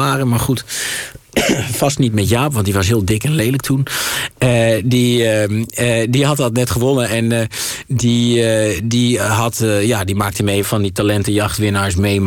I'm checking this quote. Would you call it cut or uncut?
cut